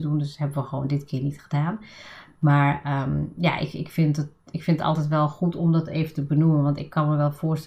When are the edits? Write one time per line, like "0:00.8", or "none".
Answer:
none